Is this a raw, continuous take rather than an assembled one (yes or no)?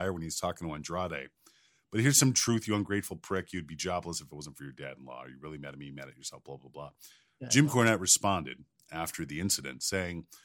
yes